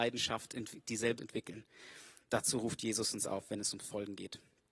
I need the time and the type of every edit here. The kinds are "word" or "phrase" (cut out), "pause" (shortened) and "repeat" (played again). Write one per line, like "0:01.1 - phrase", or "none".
0:01.2 - word